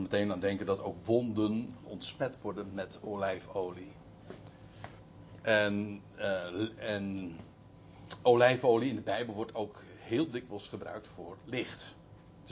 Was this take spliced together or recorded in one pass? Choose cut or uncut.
uncut